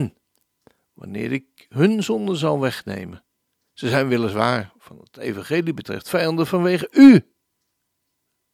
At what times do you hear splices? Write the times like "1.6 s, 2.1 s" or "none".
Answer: none